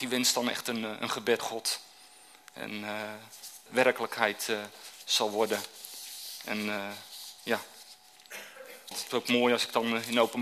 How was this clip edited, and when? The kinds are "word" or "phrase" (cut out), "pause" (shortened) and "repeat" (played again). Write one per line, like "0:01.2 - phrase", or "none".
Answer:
0:01.4 - phrase
0:03.7 - phrase
0:07.4 - pause
0:08.9 - phrase